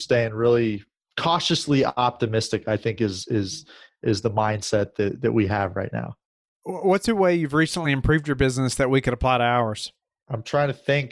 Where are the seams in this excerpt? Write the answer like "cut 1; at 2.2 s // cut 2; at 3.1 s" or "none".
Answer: none